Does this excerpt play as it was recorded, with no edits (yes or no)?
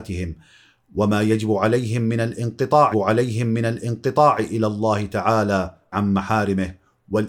no